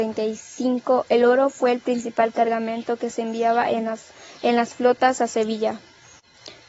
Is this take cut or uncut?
uncut